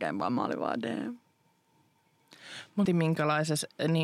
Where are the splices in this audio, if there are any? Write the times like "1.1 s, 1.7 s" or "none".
2.8 s